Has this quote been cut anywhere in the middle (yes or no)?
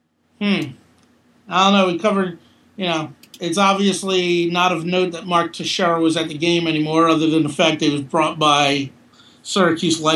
no